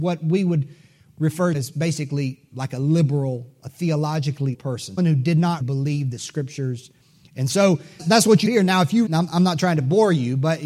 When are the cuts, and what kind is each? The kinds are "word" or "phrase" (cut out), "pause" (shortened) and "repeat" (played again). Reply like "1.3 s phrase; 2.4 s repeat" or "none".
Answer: 1.5 s word; 4.5 s word; 5.0 s word; 5.6 s word; 8.0 s word; 8.5 s word; 9.1 s word